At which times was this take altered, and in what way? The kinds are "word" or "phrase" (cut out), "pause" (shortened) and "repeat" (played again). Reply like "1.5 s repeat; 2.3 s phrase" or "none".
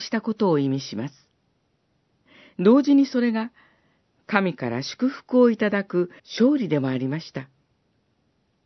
6.2 s pause